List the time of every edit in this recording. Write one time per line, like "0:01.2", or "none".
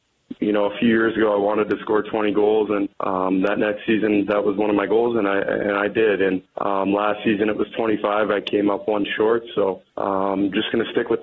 0:02.9
0:06.5
0:09.9